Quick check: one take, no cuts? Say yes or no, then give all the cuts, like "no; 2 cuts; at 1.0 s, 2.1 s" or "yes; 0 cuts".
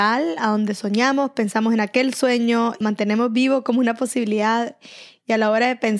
no; 1 cut; at 2.8 s